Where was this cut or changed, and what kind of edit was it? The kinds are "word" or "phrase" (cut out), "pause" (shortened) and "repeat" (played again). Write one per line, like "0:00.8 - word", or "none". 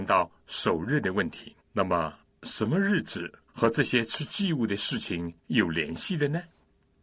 0:01.6 - pause
0:02.3 - pause
0:03.5 - pause
0:05.4 - pause